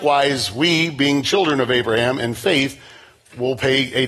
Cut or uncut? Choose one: uncut